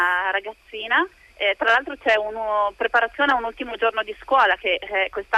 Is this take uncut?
yes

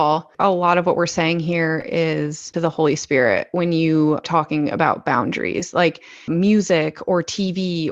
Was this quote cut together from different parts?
yes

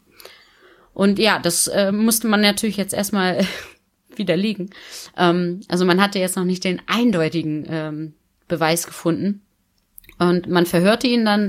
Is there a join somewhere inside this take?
no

